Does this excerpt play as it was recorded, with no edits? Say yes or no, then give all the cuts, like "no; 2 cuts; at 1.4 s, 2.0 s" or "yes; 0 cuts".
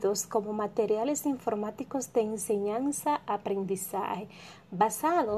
yes; 0 cuts